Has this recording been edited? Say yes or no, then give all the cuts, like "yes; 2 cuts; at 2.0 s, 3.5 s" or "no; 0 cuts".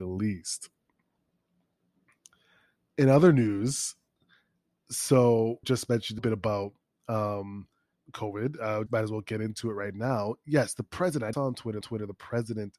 yes; 6 cuts; at 5.6 s, 6.2 s, 8.0 s, 8.9 s, 11.3 s, 11.8 s